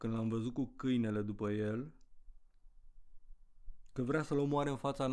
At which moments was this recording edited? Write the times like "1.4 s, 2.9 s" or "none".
none